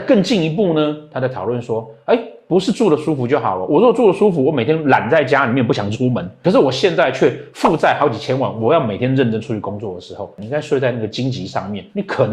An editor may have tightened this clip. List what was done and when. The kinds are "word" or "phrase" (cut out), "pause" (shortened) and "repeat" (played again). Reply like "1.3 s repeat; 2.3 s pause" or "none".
none